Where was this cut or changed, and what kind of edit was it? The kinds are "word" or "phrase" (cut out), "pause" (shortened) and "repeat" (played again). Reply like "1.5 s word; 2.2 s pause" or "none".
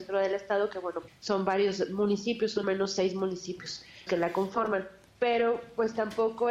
1.1 s word; 2.6 s word; 4.1 s word; 5.1 s pause